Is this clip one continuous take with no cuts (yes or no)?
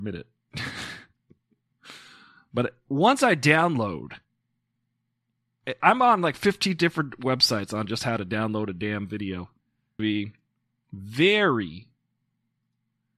no